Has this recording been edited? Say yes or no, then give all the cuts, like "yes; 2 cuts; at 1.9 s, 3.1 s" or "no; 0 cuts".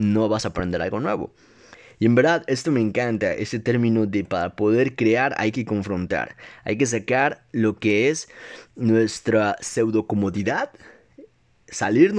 no; 0 cuts